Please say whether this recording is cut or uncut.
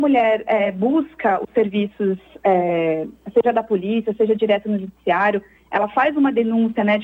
uncut